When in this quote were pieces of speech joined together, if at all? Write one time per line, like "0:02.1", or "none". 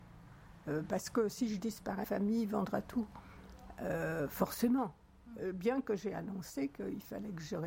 0:02.0